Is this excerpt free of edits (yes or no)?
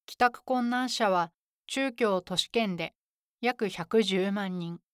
yes